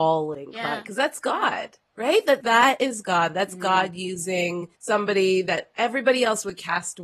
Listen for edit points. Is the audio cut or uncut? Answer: cut